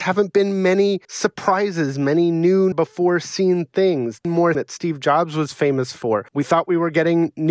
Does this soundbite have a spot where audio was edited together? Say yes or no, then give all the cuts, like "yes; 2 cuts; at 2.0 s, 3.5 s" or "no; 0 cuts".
yes; 5 cuts; at 1.0 s, 2.7 s, 4.2 s, 4.5 s, 6.3 s